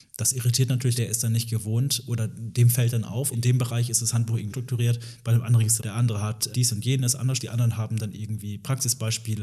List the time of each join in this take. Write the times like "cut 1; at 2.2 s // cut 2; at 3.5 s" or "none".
cut 1; at 1.0 s // cut 2; at 3.3 s // cut 3; at 4.5 s // cut 4; at 5.8 s // cut 5; at 6.5 s // cut 6; at 7.4 s

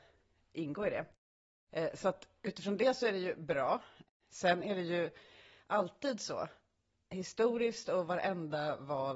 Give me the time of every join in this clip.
none

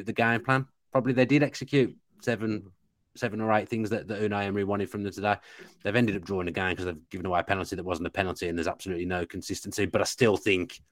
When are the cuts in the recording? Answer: none

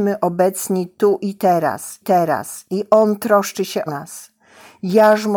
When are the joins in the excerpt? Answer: cut 1; at 2.0 s // cut 2; at 3.9 s

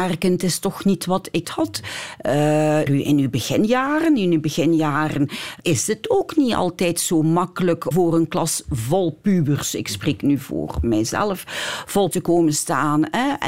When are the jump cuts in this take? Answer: cut 1; at 1.4 s // cut 2; at 2.9 s // cut 3; at 5.6 s // cut 4; at 7.9 s // cut 5; at 12.1 s

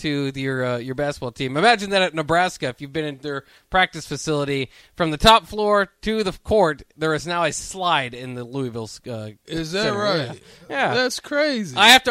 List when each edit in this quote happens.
none

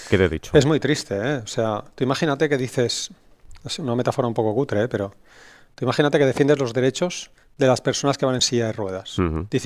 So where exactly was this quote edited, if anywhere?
none

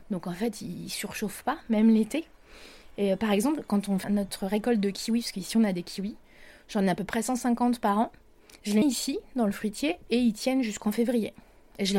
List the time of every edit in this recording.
cut 1; at 4.0 s // cut 2; at 8.8 s

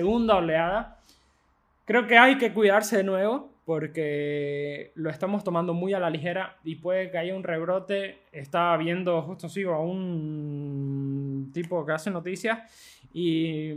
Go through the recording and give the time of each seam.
none

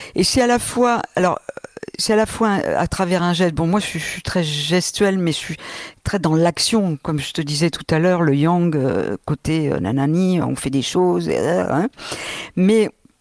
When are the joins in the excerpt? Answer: none

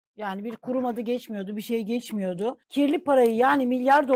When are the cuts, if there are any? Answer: cut 1; at 2.6 s

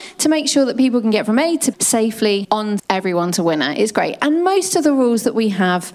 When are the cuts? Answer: cut 1; at 1.7 s // cut 2; at 2.4 s // cut 3; at 2.8 s

